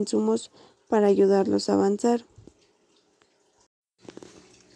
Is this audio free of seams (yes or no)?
yes